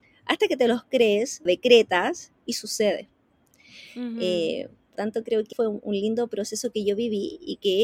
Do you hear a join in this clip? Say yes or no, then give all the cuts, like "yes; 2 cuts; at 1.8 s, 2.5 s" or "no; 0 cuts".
yes; 3 cuts; at 1.5 s, 5.0 s, 5.5 s